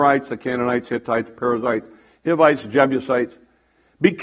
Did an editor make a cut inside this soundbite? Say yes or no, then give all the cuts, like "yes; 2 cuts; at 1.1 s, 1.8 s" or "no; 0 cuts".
no; 0 cuts